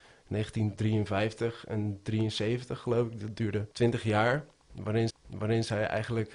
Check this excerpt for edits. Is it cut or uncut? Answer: cut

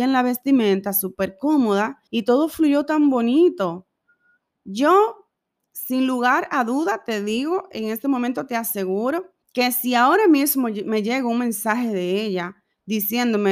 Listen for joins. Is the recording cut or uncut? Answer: cut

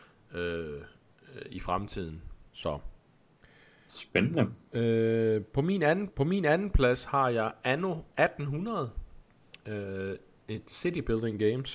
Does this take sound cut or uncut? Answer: cut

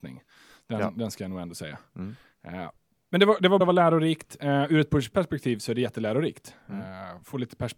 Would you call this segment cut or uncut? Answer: cut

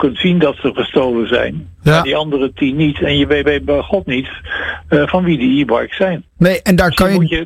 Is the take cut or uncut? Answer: cut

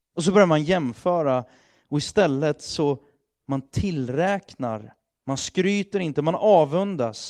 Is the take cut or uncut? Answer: uncut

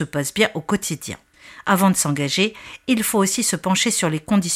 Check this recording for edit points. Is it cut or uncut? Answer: uncut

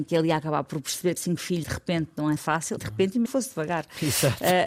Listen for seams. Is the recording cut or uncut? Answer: cut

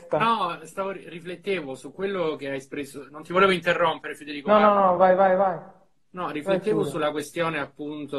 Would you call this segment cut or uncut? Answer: uncut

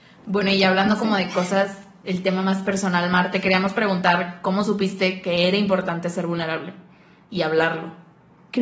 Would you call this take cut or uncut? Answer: uncut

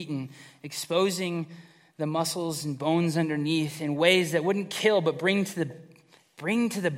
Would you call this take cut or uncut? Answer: uncut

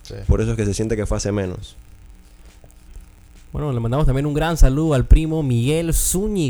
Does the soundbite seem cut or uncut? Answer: uncut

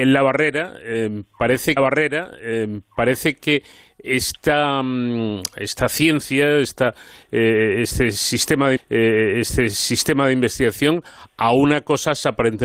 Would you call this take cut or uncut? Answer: cut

